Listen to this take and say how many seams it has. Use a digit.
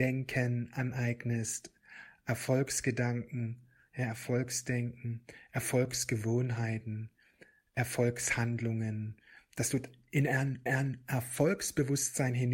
1